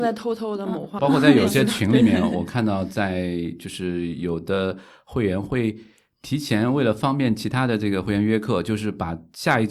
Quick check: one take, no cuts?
no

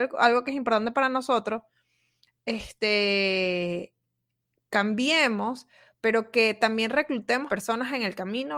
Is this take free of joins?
no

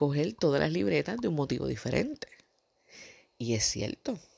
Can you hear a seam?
no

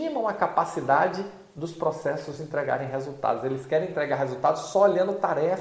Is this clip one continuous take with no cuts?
yes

